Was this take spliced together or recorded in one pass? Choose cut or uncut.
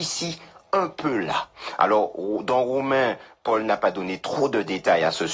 uncut